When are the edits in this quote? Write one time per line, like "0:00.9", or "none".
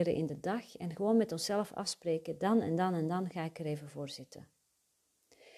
none

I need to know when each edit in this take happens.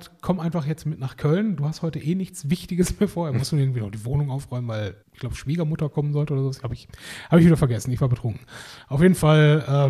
0:05.0

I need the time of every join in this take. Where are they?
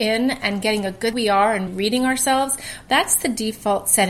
0:01.1
0:01.7

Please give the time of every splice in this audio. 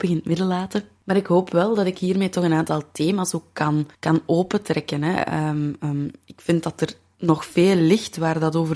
0:03.9

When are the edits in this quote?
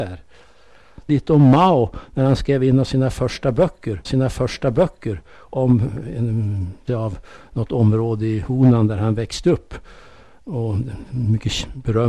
0:01.1
0:04.0
0:06.9

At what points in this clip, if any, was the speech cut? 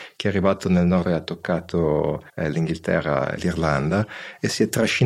0:01.0
0:02.3
0:03.4

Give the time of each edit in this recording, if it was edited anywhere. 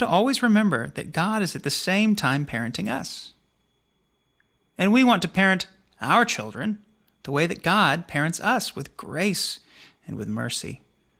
none

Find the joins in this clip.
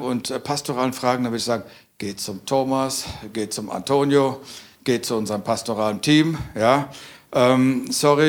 none

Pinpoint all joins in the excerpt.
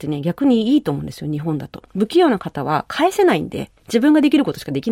0:01.9
0:03.8

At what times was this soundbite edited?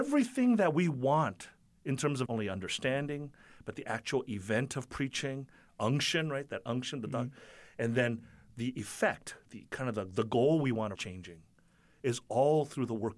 0:02.3
0:09.5
0:11.0

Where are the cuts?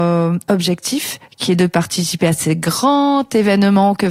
none

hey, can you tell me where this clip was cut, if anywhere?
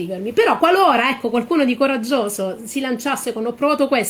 none

